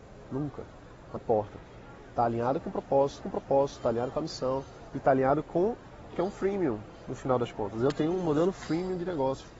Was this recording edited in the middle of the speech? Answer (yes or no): yes